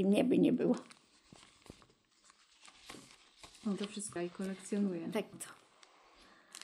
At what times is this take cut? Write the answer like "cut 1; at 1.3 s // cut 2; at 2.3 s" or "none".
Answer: cut 1; at 3.8 s // cut 2; at 4.2 s // cut 3; at 5.3 s